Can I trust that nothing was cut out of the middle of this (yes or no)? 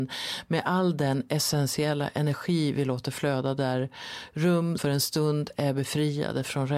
no